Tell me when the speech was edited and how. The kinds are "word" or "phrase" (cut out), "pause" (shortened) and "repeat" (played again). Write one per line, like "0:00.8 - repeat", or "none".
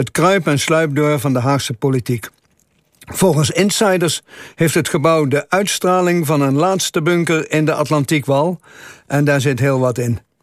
none

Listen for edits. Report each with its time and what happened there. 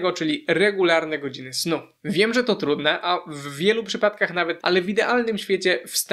0:04.6 - word

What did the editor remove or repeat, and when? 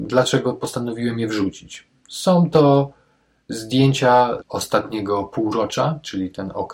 0:04.4 - word

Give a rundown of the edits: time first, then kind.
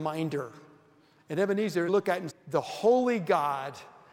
0:01.9 - phrase
0:02.3 - word

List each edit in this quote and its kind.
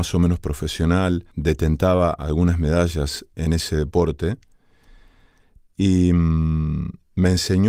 0:01.3 - pause
0:03.3 - word

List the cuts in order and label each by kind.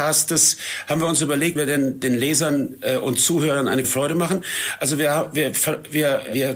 0:01.5 - phrase
0:03.8 - word

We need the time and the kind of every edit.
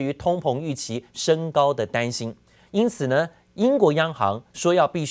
none

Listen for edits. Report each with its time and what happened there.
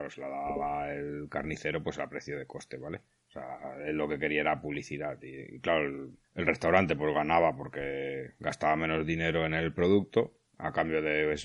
0:03.1 - pause
0:06.2 - pause
0:10.5 - pause

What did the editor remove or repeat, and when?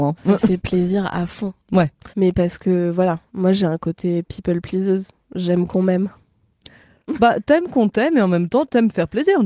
0:02.1 - pause

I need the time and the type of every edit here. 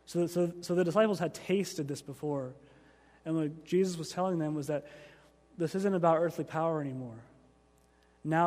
none

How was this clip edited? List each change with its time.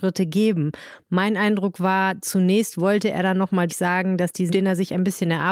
0:03.7 - word
0:04.5 - word

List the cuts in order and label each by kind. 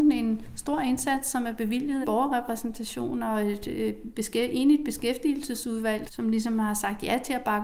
0:02.0 - phrase
0:06.1 - word

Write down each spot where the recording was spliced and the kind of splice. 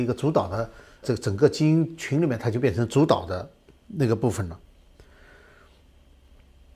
0:01.0 - word

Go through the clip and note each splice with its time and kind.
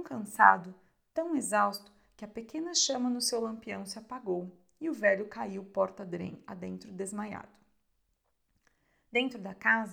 none

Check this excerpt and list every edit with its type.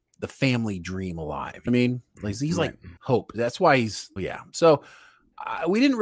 0:01.7 - phrase
0:03.0 - pause
0:04.2 - word

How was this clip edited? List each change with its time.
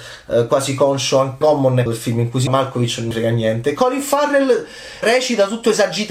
0:01.4 - word
0:01.9 - word
0:02.5 - word
0:03.1 - word
0:05.0 - word

